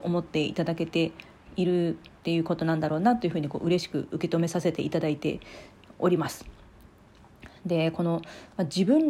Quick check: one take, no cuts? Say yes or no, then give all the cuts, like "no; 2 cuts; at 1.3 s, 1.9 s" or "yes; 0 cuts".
yes; 0 cuts